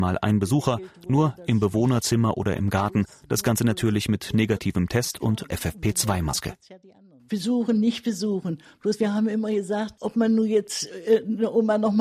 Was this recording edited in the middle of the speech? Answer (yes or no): yes